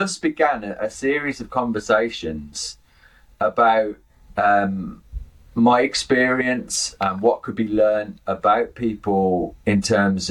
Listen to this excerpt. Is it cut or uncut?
uncut